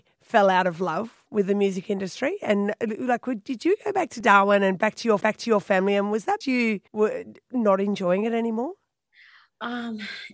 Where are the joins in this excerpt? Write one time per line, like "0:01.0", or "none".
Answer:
0:05.2
0:06.4
0:06.9

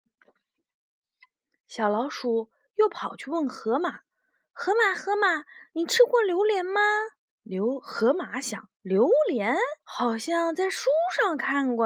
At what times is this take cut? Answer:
0:04.1
0:07.3
0:08.7
0:09.8

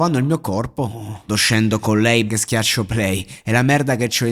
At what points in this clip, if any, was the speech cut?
0:01.3
0:02.3

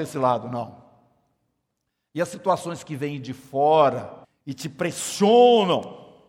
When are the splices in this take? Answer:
0:04.2

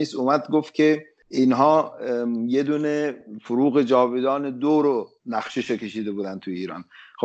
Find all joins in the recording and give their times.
none

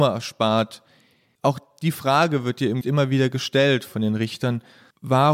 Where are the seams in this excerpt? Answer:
0:02.8

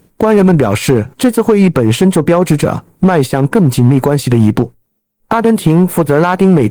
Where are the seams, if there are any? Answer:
0:01.1

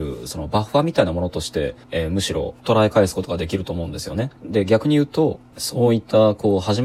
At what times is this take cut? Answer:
0:01.8
0:04.4

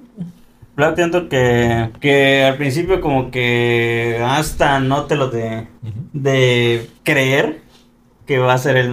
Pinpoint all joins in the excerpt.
0:01.0
0:02.0
0:05.3
0:05.8
0:07.0

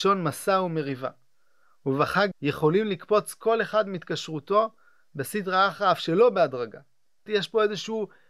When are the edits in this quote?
0:02.3
0:07.3

